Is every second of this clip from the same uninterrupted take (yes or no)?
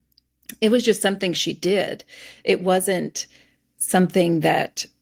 yes